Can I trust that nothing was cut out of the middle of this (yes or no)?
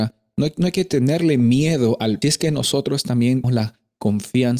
no